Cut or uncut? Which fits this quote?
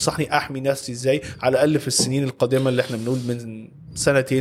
uncut